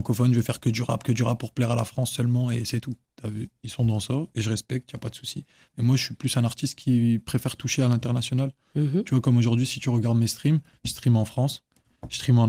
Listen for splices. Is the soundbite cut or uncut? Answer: uncut